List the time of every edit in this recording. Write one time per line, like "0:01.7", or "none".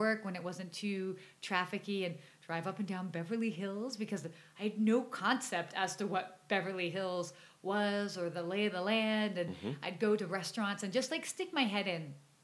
none